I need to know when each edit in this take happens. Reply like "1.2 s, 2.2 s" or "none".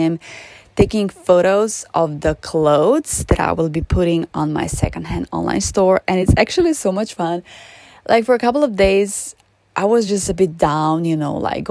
none